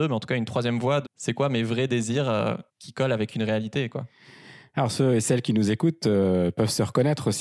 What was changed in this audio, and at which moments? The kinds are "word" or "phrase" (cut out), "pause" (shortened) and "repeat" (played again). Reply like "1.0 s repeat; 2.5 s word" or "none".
1.0 s word